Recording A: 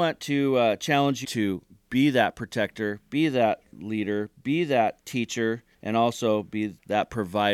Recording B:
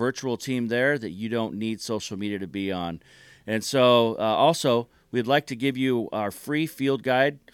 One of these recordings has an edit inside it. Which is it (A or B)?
A